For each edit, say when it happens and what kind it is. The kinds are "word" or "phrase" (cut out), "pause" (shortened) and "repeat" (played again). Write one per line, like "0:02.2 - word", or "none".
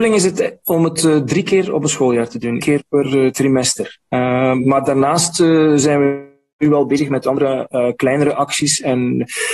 0:02.6 - word